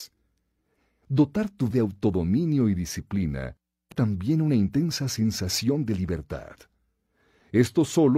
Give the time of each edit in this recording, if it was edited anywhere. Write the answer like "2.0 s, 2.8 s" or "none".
1.7 s, 3.9 s

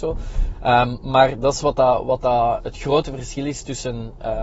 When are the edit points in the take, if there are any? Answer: none

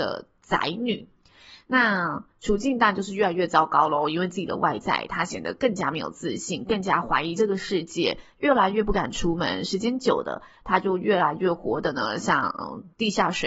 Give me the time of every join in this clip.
none

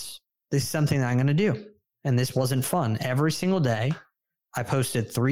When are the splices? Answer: none

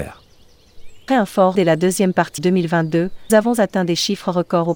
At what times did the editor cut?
1.1 s, 1.5 s, 2.4 s, 3.3 s

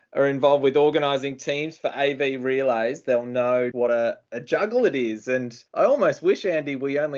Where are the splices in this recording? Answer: 3.7 s, 5.7 s

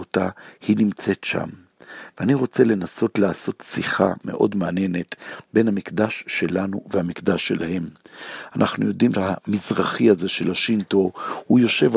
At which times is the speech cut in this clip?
9.1 s

